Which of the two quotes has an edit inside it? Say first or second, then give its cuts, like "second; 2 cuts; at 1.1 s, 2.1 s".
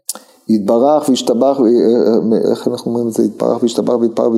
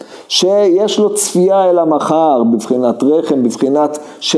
first; 1 cut; at 2.4 s